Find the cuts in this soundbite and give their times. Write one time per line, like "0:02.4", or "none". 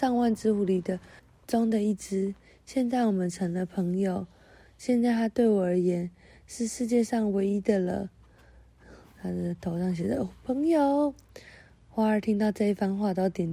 0:01.2